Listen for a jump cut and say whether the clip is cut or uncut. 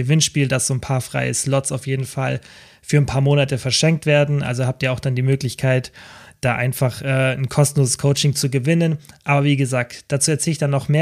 uncut